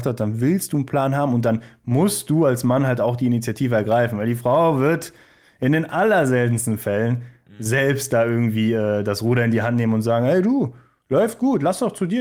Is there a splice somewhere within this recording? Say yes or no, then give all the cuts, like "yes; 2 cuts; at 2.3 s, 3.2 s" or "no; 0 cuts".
no; 0 cuts